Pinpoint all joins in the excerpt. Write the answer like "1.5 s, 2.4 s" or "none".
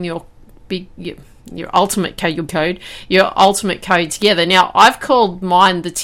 2.5 s